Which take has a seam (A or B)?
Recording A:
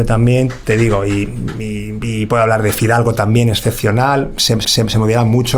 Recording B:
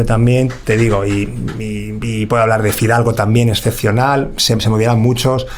A